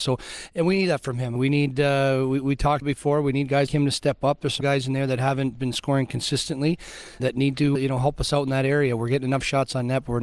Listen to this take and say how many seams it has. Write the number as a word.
six